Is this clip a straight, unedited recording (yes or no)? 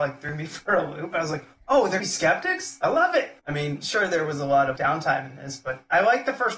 no